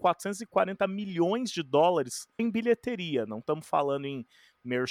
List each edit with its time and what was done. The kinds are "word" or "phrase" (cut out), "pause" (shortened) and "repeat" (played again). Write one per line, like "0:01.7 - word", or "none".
0:02.4 - word